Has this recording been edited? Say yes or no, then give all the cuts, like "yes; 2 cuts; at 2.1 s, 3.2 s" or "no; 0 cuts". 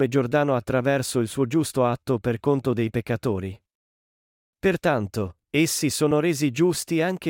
no; 0 cuts